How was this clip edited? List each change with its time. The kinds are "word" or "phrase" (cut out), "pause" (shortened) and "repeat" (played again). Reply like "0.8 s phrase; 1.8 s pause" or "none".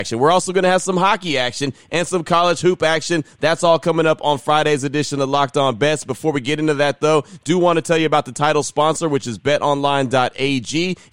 none